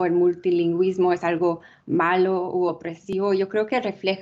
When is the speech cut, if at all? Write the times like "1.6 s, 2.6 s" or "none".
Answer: none